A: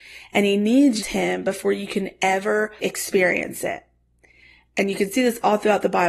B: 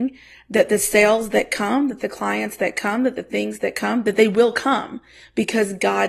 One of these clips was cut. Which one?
A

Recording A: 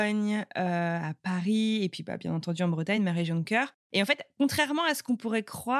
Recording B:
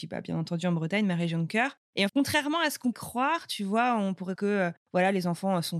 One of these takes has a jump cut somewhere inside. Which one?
B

